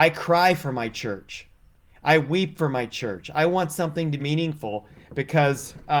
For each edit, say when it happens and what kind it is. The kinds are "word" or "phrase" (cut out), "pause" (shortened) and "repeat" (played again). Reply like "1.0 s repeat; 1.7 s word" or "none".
4.2 s phrase